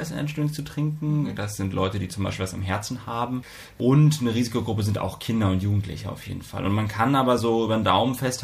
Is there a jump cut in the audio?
no; 0 cuts

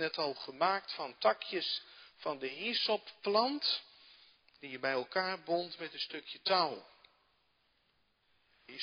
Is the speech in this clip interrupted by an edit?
no; 0 cuts

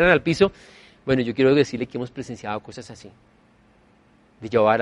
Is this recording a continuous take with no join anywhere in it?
yes; 0 cuts

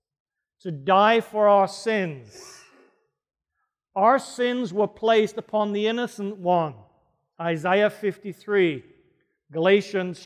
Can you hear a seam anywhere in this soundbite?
no; 0 cuts

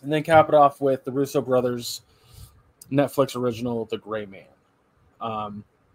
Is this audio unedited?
yes; 0 cuts

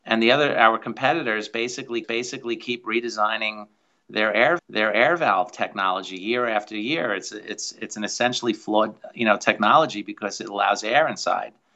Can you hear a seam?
yes; 3 cuts; at 2.0 s, 4.6 s, 7.3 s

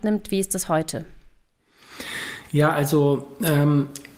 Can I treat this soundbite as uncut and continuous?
yes; 0 cuts

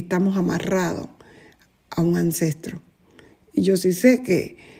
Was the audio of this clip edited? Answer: no; 0 cuts

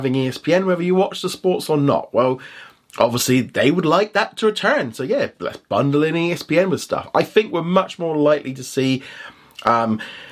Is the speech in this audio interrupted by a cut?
no; 0 cuts

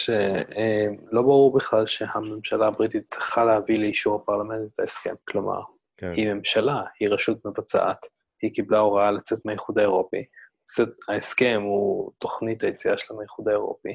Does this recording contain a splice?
yes; 1 cut; at 5.2 s

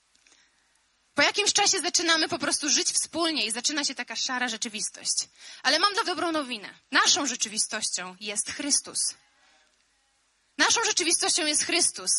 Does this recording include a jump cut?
yes; 2 cuts; at 6.0 s, 6.8 s

